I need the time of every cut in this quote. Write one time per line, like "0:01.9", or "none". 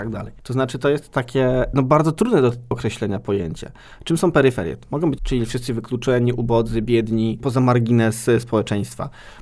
0:02.7
0:05.2
0:07.4